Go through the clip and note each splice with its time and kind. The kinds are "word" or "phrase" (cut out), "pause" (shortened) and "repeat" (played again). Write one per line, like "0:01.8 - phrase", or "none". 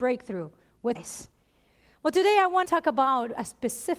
0:01.0 - word
0:02.6 - word